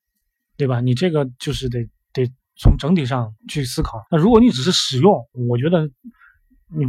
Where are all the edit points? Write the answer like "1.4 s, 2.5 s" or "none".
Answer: 3.4 s, 4.1 s